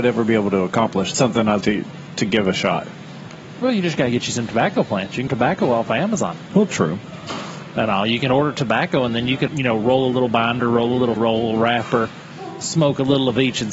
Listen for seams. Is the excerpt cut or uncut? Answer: cut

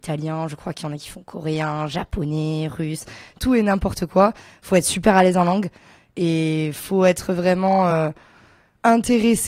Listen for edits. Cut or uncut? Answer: uncut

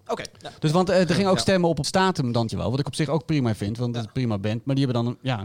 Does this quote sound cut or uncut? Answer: cut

